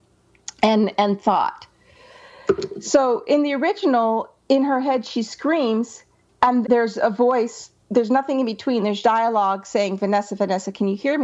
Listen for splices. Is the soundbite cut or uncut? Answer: cut